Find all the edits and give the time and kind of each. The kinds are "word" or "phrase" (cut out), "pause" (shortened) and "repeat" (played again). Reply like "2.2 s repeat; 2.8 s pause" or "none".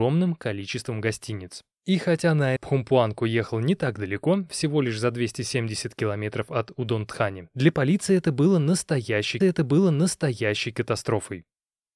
2.6 s phrase; 9.4 s repeat